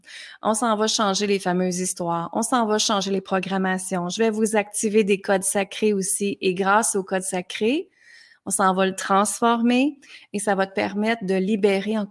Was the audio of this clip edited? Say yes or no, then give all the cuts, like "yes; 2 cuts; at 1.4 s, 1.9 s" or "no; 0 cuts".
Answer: no; 0 cuts